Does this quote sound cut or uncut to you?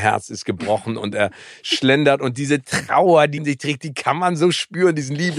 cut